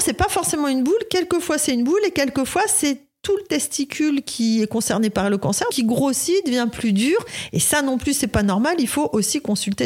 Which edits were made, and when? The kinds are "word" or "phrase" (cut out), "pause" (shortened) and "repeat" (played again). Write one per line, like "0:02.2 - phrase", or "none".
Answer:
0:05.7 - word